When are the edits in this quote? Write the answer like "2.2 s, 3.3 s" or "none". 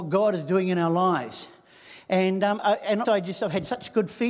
2.6 s, 3.0 s